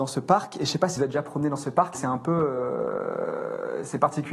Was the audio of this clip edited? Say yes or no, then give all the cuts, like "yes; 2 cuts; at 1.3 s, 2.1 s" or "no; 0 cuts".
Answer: yes; 2 cuts; at 1.0 s, 1.9 s